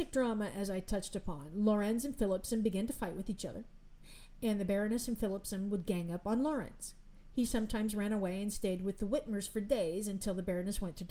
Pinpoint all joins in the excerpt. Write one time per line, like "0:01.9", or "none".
none